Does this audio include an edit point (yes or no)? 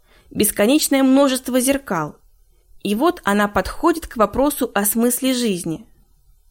no